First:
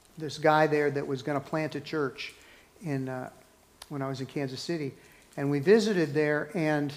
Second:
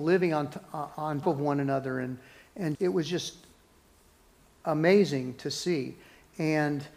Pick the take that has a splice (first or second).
second